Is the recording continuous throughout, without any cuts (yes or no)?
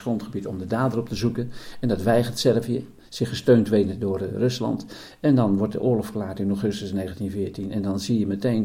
yes